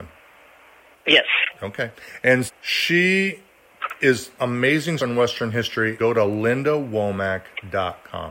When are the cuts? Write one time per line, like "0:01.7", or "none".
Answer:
0:02.5
0:04.4
0:05.0
0:06.0